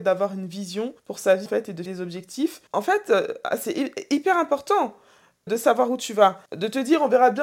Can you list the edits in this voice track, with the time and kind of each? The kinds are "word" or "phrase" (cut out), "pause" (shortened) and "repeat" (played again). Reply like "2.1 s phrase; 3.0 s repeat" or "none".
1.0 s pause; 1.5 s word; 1.9 s word; 2.7 s pause; 5.5 s word; 6.5 s pause